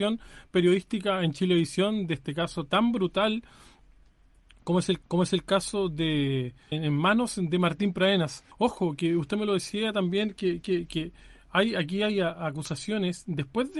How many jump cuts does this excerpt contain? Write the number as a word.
four